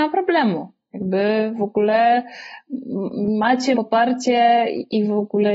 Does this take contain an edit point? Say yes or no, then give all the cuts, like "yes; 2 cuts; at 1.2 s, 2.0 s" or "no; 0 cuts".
yes; 1 cut; at 3.7 s